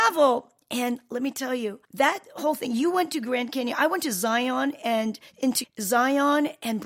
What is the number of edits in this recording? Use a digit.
2